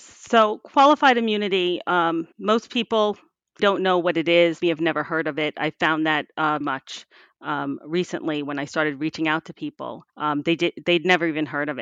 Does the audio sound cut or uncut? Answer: cut